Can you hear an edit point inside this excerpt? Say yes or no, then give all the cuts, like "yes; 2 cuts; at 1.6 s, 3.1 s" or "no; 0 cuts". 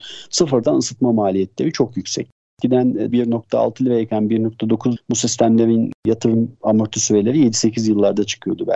yes; 3 cuts; at 3.1 s, 5.0 s, 6.0 s